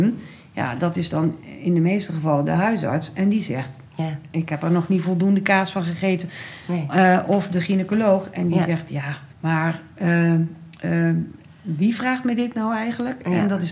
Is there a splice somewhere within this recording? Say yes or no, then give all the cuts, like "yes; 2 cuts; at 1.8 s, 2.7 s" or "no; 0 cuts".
yes; 2 cuts; at 3.9 s, 9.3 s